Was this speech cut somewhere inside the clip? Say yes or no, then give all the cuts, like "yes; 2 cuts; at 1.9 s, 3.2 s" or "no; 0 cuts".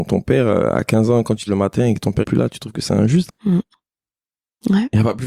yes; 3 cuts; at 1.5 s, 2.2 s, 3.3 s